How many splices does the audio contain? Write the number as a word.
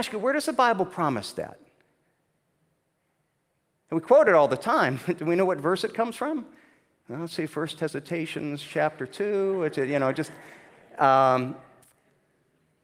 zero